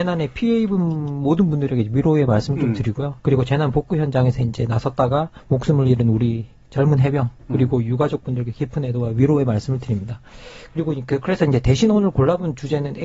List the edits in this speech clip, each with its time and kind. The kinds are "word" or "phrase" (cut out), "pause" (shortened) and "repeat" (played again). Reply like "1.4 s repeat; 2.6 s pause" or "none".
3.2 s pause; 5.4 s pause